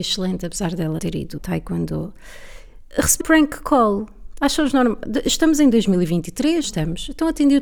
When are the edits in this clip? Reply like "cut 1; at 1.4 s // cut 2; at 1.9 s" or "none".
cut 1; at 1.0 s // cut 2; at 1.4 s // cut 3; at 3.2 s // cut 4; at 6.6 s